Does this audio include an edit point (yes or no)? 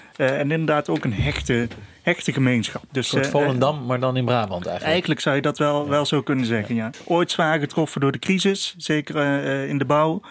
no